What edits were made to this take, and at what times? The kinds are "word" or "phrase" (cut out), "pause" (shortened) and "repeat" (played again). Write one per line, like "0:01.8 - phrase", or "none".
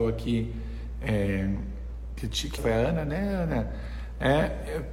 0:02.6 - phrase